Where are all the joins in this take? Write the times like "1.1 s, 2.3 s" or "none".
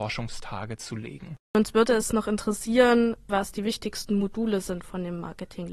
1.4 s